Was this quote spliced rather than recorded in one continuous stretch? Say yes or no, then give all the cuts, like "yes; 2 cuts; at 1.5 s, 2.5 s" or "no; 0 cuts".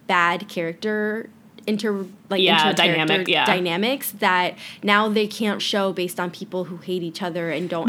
yes; 2 cuts; at 3.3 s, 5.6 s